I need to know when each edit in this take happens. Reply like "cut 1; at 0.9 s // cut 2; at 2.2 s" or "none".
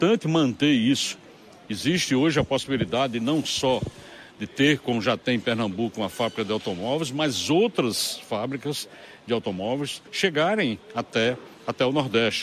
cut 1; at 10.1 s